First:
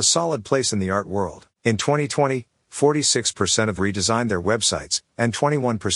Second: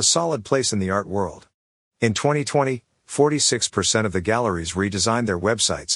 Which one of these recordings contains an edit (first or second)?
first